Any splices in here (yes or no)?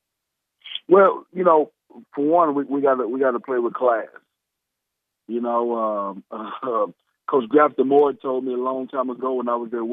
no